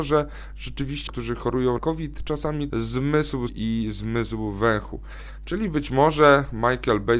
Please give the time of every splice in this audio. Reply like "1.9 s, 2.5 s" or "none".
1.1 s, 1.8 s, 2.7 s, 3.5 s